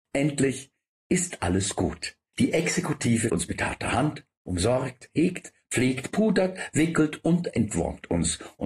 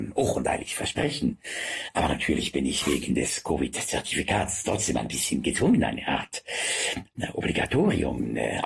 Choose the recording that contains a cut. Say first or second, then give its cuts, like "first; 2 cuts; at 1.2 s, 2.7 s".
first; 1 cut; at 3.3 s